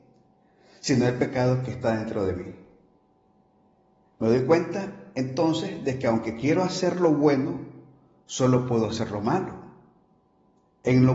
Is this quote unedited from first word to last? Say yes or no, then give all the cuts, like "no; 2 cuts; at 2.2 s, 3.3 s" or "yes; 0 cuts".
yes; 0 cuts